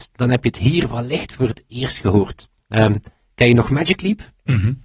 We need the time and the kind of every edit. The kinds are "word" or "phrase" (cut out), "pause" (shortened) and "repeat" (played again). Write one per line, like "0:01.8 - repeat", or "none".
none